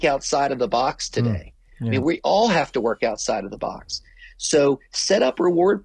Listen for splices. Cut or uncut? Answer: uncut